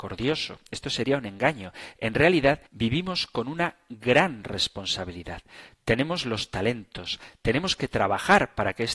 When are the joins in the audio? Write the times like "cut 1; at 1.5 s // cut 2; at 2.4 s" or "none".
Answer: cut 1; at 2.7 s